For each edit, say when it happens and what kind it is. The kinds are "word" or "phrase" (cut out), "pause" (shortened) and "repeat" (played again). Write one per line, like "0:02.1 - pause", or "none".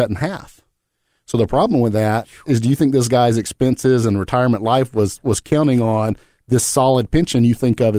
none